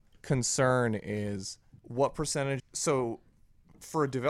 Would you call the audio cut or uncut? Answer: cut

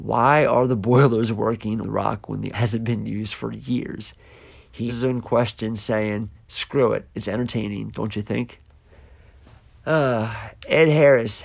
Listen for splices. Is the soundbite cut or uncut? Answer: cut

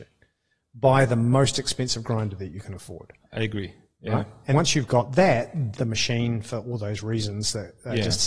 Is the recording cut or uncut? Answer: cut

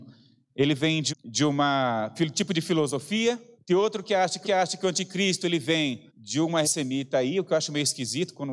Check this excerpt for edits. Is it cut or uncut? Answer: cut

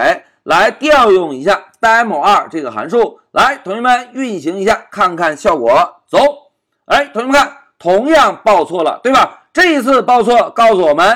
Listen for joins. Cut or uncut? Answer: uncut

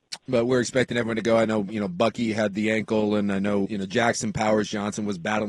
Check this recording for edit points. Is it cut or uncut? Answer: cut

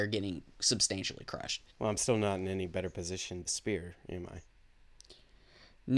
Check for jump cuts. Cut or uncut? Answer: cut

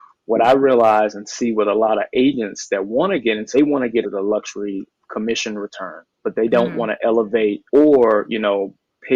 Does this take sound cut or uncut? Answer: cut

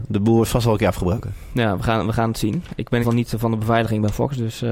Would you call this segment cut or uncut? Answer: cut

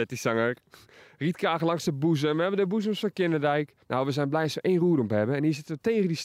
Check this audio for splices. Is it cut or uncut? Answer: cut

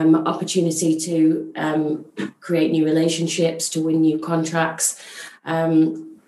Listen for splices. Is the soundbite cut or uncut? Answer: uncut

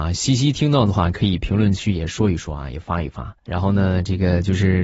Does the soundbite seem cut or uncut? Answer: cut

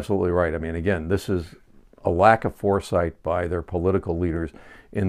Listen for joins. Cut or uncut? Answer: uncut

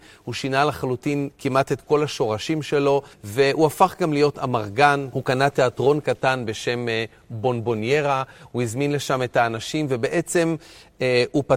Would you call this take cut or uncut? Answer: cut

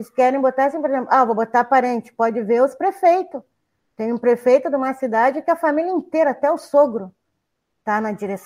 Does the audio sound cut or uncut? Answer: uncut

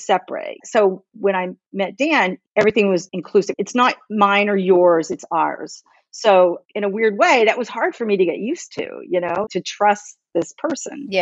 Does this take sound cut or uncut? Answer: cut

